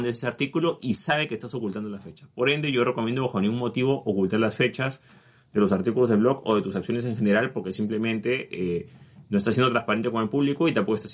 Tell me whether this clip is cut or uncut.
uncut